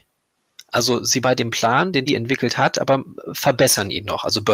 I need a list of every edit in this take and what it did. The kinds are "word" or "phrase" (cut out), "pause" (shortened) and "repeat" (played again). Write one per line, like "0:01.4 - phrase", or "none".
0:01.2 - word
0:02.1 - word